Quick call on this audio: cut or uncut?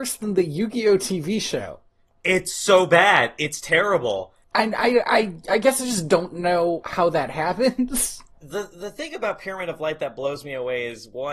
cut